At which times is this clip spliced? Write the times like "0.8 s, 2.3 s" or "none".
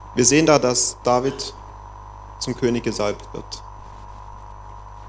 none